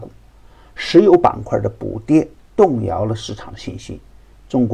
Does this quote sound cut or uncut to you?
uncut